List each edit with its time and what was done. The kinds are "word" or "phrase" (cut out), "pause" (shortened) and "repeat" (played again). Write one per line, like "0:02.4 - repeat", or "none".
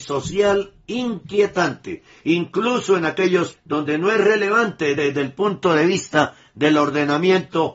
0:03.5 - word
0:05.0 - repeat